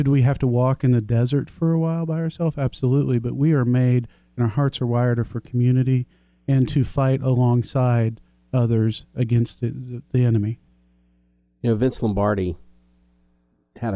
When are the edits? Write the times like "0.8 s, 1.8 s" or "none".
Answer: none